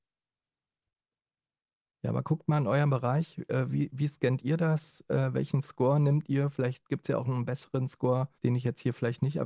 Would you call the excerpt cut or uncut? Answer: cut